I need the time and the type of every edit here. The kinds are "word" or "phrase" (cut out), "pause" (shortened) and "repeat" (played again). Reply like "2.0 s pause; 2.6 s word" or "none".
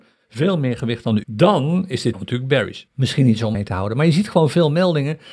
1.2 s word; 2.1 s word; 2.9 s pause; 3.5 s word